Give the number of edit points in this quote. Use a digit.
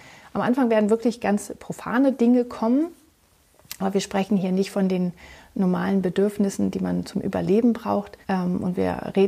1